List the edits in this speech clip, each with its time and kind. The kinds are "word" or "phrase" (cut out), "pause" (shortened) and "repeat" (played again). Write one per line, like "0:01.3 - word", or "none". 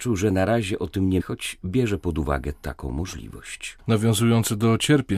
0:01.2 - word